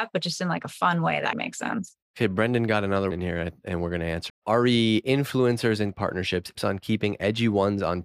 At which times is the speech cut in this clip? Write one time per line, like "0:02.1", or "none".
0:01.3
0:02.0
0:03.1
0:04.3
0:05.9
0:06.5